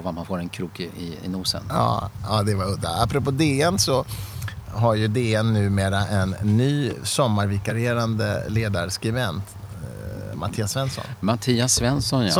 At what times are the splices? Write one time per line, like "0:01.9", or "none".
none

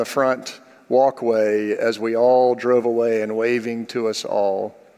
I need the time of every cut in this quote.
none

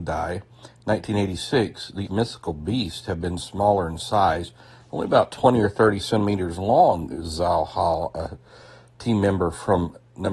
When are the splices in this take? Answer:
0:02.1

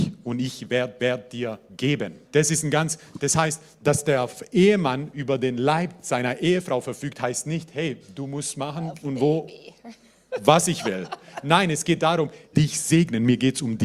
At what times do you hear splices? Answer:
0:01.0
0:02.2
0:09.0
0:12.5

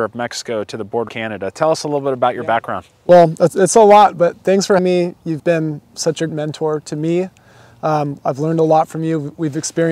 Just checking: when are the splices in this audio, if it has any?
0:01.1
0:04.8
0:05.4
0:06.3

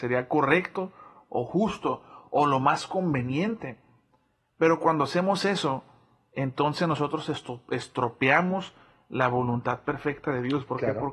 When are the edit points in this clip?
none

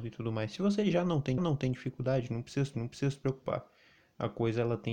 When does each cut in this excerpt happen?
0:01.4
0:02.7

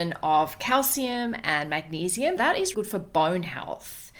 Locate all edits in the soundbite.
0:02.4
0:02.7

